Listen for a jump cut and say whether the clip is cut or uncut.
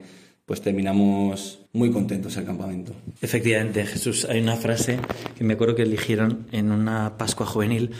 cut